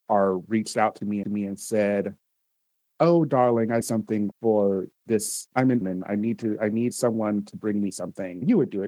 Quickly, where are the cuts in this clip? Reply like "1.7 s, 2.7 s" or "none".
1.2 s, 3.8 s, 5.8 s